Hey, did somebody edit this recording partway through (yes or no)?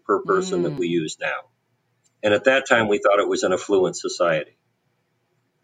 no